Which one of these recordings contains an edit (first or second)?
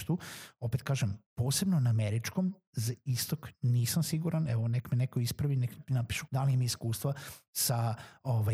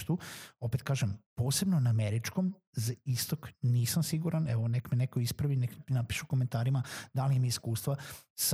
first